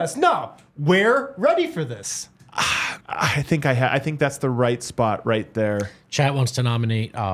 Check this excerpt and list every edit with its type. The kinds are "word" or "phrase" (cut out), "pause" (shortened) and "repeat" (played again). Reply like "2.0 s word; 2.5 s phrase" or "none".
3.0 s pause